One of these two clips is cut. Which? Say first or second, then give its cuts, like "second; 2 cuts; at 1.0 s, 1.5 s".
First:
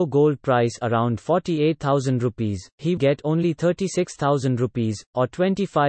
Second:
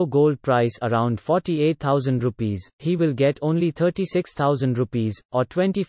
first; 1 cut; at 3.0 s